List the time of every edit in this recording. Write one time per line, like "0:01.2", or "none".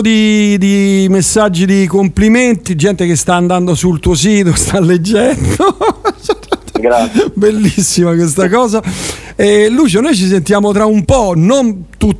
0:02.7
0:10.7